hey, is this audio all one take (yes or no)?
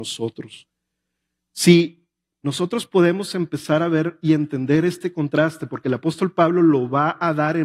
yes